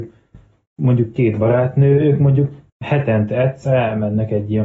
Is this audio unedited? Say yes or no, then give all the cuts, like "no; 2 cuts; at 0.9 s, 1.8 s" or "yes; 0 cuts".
no; 1 cut; at 2.7 s